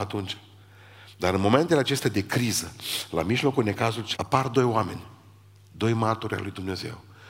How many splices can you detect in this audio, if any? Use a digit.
1